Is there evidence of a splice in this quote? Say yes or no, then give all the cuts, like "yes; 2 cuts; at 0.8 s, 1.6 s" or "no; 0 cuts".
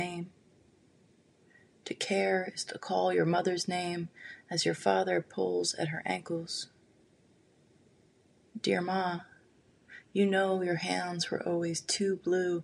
no; 0 cuts